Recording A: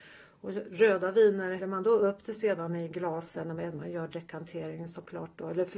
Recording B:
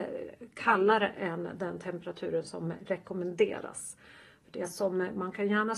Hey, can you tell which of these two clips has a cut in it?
A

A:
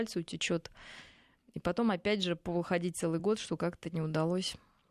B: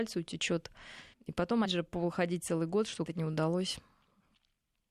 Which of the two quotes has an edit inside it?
B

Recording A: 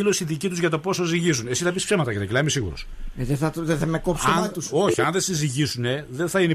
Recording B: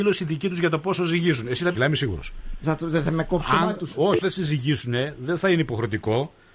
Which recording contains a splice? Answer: B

